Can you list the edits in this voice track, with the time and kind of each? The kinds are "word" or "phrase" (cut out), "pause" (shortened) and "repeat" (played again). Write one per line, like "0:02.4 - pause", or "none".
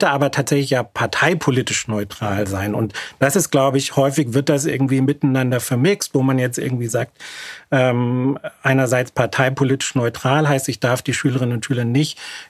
none